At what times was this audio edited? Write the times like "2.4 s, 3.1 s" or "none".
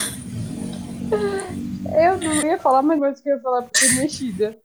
2.4 s, 3.0 s, 3.7 s